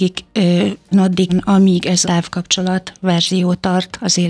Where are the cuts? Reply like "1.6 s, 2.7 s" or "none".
0.9 s, 1.3 s, 2.0 s